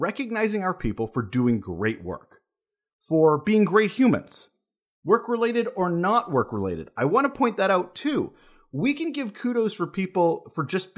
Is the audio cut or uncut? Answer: uncut